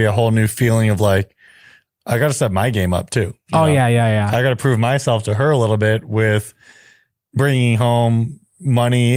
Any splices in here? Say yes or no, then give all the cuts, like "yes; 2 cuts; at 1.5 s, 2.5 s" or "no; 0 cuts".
no; 0 cuts